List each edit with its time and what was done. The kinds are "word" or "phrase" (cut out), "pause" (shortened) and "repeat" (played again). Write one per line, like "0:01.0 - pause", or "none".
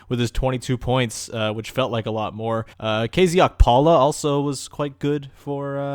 0:02.7 - pause

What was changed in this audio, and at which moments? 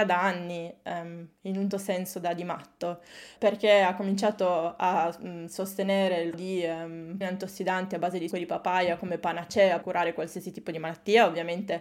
0:01.7 - word
0:03.4 - word
0:06.3 - word
0:07.2 - word
0:08.3 - word
0:09.8 - word

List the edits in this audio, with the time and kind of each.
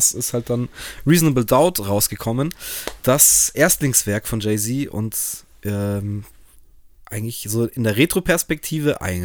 none

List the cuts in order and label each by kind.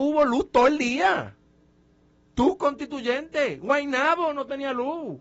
none

